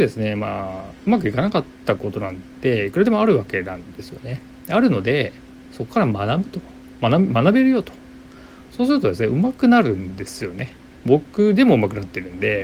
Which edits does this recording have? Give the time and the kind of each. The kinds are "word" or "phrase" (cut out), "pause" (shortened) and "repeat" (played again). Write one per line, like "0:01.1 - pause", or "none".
none